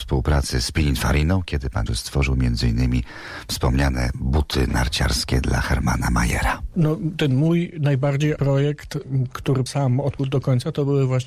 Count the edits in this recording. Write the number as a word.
four